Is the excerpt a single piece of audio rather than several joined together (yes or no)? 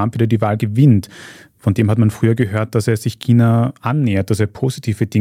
yes